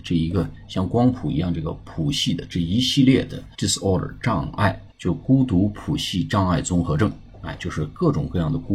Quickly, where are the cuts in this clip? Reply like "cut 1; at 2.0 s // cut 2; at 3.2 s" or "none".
cut 1; at 3.5 s // cut 2; at 4.9 s